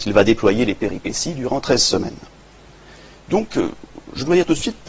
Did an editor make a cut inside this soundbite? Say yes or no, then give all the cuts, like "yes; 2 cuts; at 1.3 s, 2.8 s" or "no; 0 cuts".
no; 0 cuts